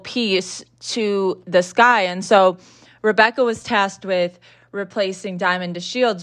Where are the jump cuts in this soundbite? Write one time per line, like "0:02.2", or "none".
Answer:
none